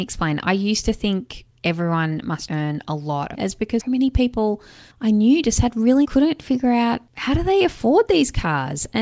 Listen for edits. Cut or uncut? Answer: cut